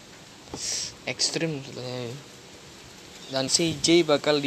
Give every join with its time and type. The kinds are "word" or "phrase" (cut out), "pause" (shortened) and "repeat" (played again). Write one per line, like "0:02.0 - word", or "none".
0:03.5 - word